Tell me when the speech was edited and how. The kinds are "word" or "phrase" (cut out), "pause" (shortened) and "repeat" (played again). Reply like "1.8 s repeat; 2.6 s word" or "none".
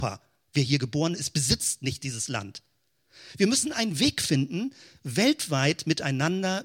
none